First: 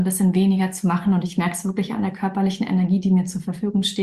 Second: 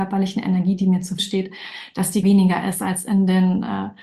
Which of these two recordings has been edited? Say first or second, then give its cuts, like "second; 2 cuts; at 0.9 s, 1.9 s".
second; 2 cuts; at 1.2 s, 2.2 s